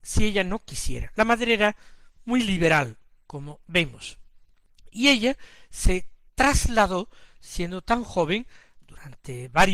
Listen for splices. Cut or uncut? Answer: uncut